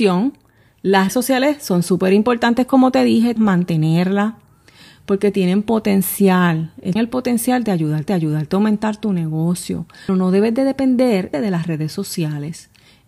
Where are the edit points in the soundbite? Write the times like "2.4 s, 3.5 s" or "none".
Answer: 1.1 s, 3.4 s, 7.0 s, 8.1 s, 10.1 s, 11.3 s